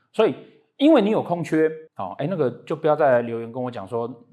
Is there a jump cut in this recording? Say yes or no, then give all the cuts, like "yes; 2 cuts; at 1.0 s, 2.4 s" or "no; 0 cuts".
yes; 1 cut; at 1.9 s